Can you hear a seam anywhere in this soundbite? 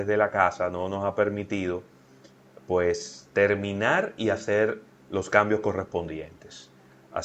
no; 0 cuts

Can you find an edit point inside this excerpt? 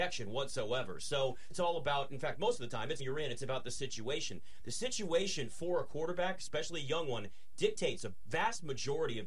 yes; 2 cuts; at 1.5 s, 3.0 s

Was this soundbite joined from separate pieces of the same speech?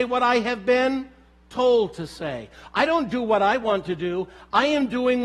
no; 0 cuts

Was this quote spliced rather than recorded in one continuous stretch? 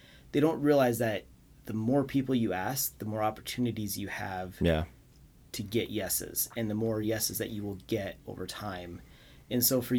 no; 0 cuts

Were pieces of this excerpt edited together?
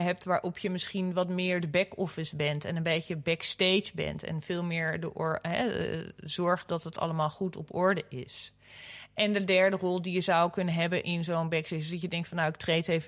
no; 0 cuts

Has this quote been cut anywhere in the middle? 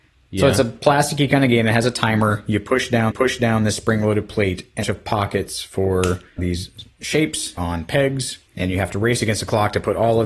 yes; 5 cuts; at 3.1 s, 4.8 s, 6.4 s, 7.6 s, 8.5 s

